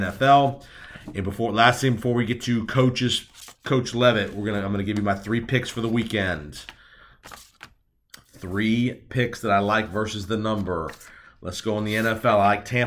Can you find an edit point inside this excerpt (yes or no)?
yes